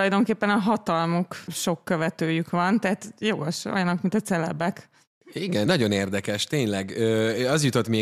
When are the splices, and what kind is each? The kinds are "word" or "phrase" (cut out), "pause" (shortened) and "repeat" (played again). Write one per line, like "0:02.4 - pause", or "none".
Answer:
0:01.5 - phrase
0:05.7 - word